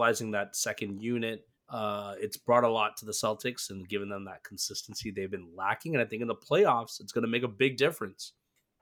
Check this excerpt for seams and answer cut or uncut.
cut